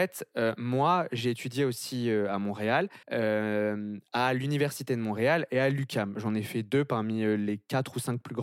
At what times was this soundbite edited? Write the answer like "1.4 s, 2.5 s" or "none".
3.0 s